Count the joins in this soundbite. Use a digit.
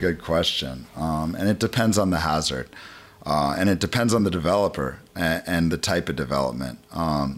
0